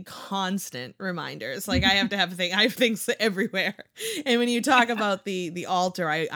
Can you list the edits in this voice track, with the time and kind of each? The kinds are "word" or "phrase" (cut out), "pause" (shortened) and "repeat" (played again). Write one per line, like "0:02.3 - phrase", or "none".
none